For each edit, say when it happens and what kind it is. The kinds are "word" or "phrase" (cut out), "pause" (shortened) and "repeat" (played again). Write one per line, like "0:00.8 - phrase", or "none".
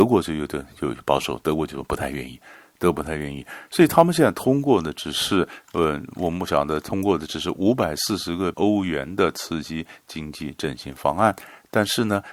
0:08.5 - word